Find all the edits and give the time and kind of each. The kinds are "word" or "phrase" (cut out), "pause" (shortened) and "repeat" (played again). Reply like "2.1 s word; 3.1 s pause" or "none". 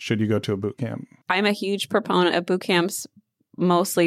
none